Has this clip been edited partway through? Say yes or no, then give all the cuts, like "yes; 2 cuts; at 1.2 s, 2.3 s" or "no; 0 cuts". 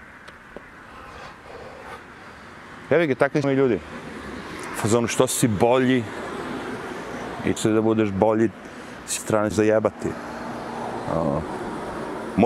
yes; 4 cuts; at 3.4 s, 7.6 s, 9.2 s, 9.5 s